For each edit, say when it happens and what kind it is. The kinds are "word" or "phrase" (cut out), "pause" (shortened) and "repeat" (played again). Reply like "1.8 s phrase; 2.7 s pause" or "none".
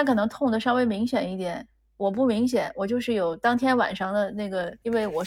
none